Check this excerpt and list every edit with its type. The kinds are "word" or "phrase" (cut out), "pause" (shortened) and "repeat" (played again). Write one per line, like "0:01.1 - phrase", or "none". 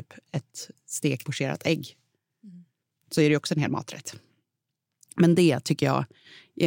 0:01.2 - word